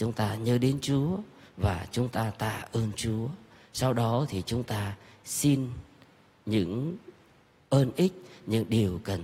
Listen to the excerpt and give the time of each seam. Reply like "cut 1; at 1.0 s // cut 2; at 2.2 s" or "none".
none

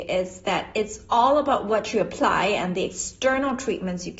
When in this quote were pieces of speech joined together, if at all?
none

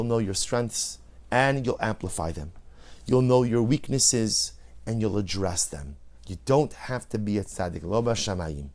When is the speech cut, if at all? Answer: cut 1; at 6.2 s

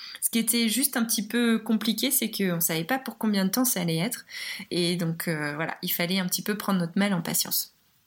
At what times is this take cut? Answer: none

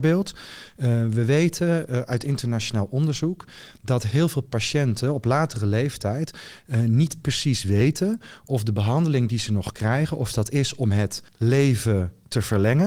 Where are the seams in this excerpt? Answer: cut 1; at 11.3 s

